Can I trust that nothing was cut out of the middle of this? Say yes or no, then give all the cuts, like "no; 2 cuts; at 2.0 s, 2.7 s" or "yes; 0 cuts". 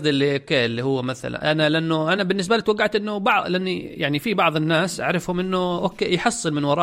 yes; 0 cuts